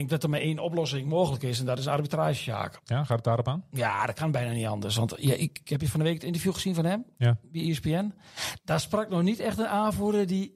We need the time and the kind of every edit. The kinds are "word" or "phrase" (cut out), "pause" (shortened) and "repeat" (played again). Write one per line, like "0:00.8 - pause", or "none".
none